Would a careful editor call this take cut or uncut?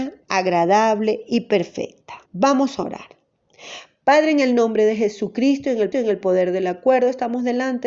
cut